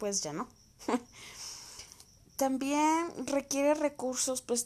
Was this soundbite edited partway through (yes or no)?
yes